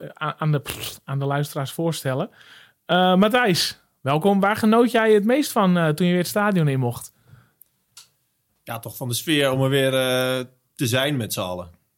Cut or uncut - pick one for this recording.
uncut